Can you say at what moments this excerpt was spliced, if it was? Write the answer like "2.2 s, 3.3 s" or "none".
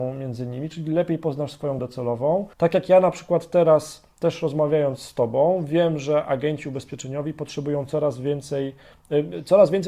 1.8 s, 2.5 s

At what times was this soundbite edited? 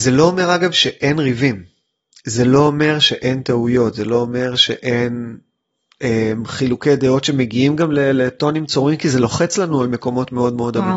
none

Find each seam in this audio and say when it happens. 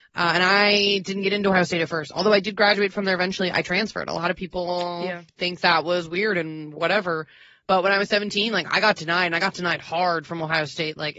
none

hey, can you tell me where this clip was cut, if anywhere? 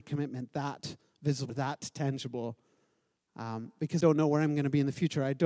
1.5 s, 4.0 s

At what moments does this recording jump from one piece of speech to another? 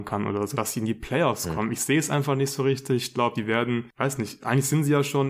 none

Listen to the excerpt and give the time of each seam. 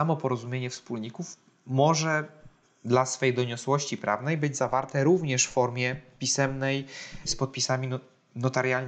none

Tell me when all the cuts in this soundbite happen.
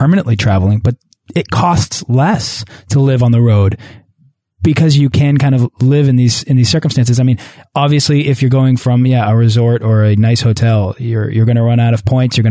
none

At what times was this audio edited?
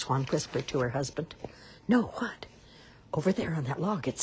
none

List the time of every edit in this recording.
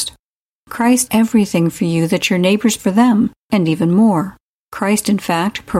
1.1 s, 2.8 s

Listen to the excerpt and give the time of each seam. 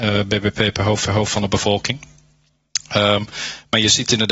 1.0 s

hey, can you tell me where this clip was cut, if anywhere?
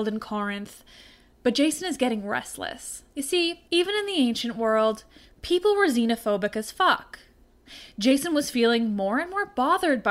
3.1 s, 3.7 s

